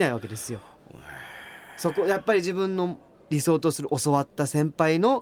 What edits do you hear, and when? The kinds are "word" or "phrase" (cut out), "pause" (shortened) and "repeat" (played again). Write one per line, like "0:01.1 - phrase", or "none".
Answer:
none